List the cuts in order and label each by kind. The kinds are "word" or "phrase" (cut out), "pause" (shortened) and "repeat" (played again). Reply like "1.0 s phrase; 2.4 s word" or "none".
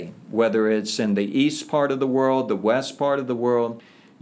none